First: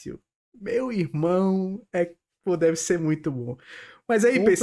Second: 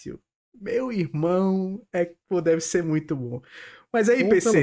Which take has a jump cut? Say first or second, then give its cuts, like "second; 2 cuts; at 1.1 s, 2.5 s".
second; 1 cut; at 2.2 s